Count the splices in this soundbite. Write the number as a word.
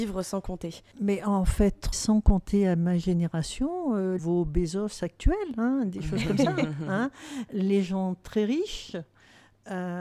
two